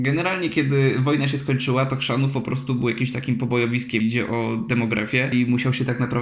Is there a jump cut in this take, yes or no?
yes